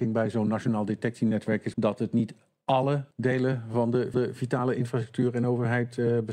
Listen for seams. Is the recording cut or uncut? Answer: cut